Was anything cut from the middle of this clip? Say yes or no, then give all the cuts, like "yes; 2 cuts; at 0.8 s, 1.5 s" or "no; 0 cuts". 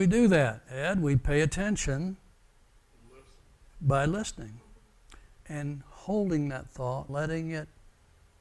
yes; 1 cut; at 7.1 s